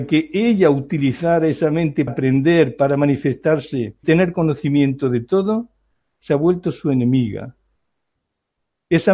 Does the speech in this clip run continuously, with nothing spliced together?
no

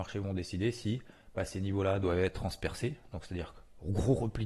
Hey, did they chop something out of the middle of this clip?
no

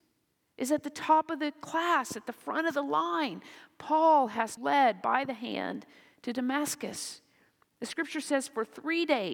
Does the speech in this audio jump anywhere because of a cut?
yes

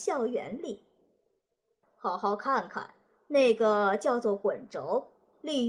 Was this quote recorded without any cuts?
yes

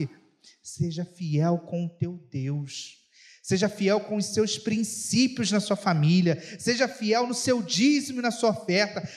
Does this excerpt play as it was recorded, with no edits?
yes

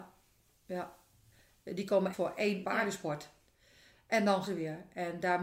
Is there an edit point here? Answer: yes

